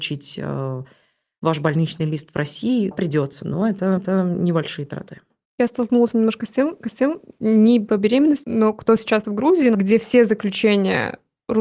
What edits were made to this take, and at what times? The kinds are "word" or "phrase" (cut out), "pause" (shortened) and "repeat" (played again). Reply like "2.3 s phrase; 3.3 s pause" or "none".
2.9 s word; 4.0 s repeat; 6.1 s word; 6.8 s repeat; 8.4 s word; 9.2 s word; 9.7 s phrase